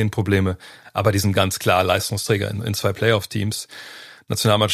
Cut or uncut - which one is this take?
uncut